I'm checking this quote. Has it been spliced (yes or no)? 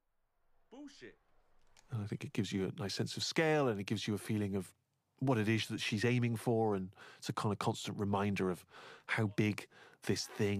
no